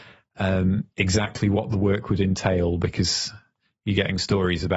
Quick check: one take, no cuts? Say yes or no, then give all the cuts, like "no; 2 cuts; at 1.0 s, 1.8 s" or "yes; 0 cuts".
yes; 0 cuts